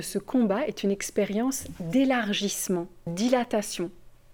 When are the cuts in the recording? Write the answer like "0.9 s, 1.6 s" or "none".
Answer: 3.1 s